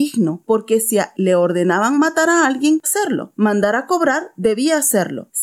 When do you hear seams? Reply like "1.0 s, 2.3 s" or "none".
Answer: 1.1 s, 2.8 s

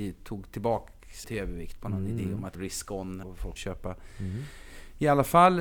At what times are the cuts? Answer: 1.2 s, 2.5 s, 3.2 s, 3.6 s

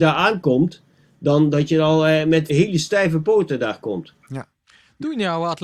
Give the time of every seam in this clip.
2.5 s

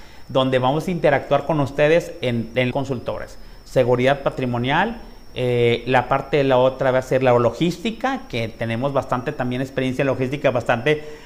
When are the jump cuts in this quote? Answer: 2.7 s

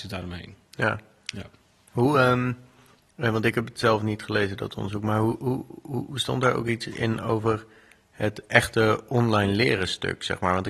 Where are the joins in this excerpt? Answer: none

